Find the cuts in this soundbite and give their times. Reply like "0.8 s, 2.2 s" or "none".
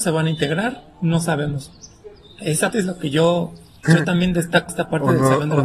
2.7 s, 3.8 s, 4.7 s